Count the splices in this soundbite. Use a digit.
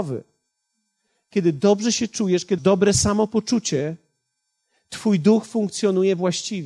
1